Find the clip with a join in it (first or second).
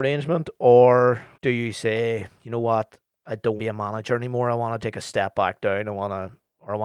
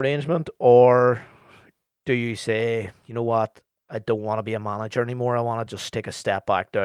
first